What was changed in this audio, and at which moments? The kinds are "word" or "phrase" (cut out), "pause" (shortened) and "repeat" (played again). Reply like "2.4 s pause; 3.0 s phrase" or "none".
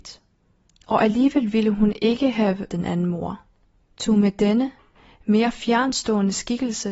2.7 s word